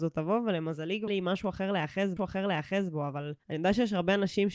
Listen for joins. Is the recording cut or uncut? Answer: cut